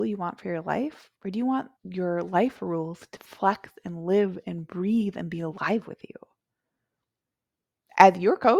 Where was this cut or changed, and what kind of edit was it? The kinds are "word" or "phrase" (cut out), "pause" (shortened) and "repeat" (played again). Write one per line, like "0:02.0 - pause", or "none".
0:01.2 - pause
0:01.8 - pause
0:03.2 - word